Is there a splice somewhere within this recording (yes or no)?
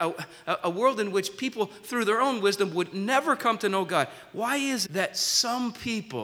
yes